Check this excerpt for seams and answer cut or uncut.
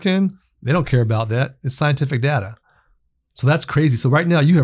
uncut